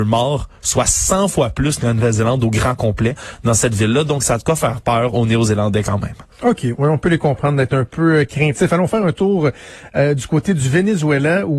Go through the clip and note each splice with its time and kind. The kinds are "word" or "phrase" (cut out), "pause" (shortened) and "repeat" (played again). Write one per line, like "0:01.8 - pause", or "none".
0:06.3 - pause